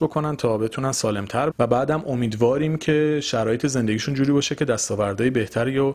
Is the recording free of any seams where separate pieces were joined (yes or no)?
no